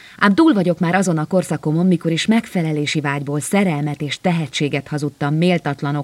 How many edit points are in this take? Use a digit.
0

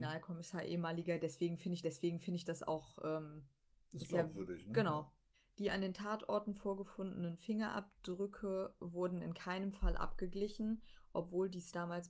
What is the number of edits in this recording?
3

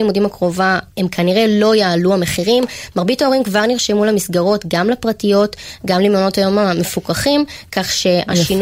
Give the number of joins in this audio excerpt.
1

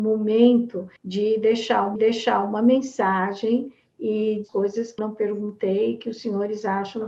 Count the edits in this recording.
4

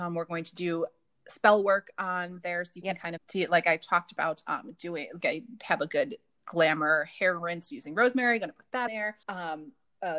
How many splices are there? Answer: 4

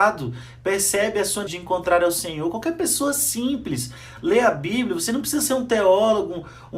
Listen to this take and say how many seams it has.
1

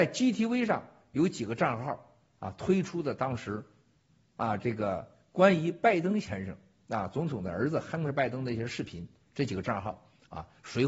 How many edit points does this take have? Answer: 0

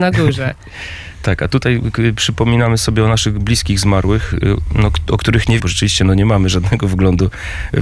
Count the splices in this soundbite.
1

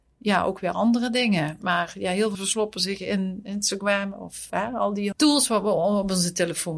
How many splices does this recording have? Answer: 3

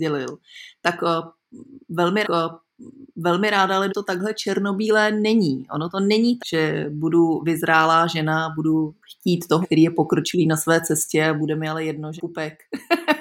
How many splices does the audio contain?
6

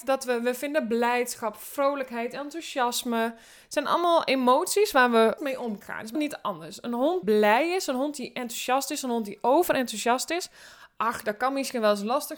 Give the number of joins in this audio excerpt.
4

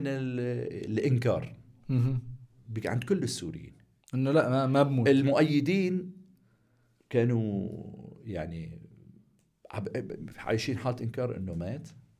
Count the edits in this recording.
1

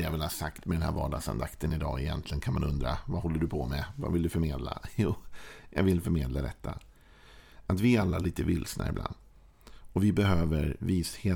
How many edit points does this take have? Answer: 0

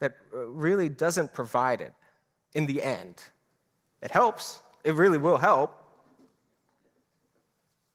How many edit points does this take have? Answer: 0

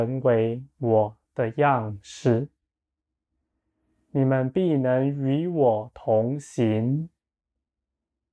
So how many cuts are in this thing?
0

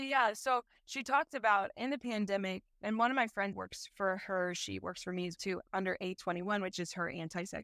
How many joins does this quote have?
3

